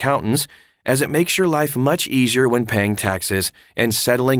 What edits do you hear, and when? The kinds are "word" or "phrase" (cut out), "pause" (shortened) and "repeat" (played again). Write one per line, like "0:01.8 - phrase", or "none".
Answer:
none